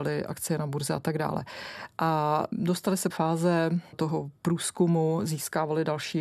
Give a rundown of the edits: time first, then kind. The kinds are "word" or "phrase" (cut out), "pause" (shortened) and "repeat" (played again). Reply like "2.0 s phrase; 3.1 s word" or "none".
3.1 s phrase